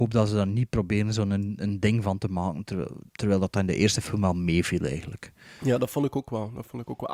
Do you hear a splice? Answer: yes; 1 cut; at 3.1 s

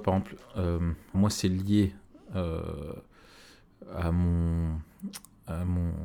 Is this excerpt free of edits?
no; 1 cut; at 1.1 s

